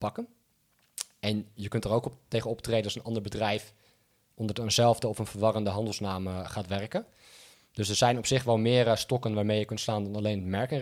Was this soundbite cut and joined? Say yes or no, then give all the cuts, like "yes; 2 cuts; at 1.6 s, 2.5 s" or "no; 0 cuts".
no; 0 cuts